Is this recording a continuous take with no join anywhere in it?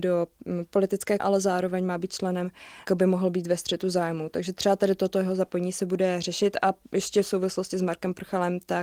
no; 2 cuts; at 1.2 s, 2.9 s

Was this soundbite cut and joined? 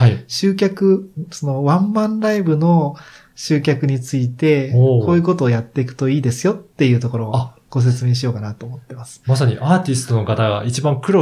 no; 0 cuts

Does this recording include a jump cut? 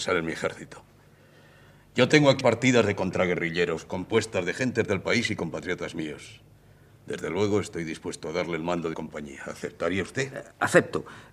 yes; 2 cuts; at 2.4 s, 8.9 s

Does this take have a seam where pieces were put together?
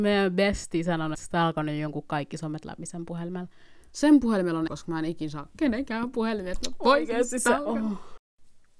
yes; 2 cuts; at 1.1 s, 4.7 s

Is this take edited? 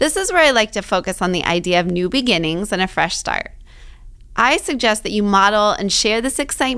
no; 0 cuts

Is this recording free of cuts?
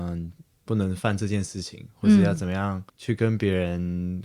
no; 1 cut; at 2.9 s

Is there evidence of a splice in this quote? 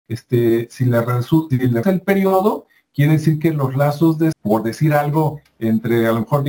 yes; 3 cuts; at 1.5 s, 1.8 s, 4.3 s

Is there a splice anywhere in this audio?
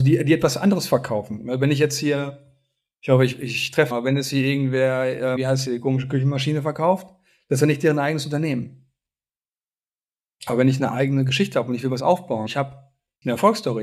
yes; 4 cuts; at 3.9 s, 5.4 s, 12.0 s, 12.5 s

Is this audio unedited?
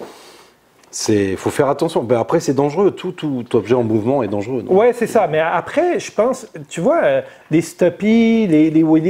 yes; 0 cuts

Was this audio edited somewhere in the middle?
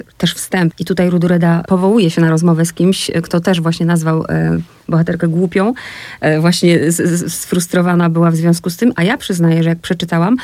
no; 0 cuts

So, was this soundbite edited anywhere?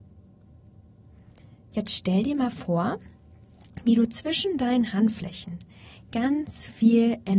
no; 0 cuts

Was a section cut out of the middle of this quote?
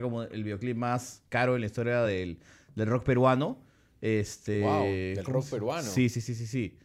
no; 0 cuts

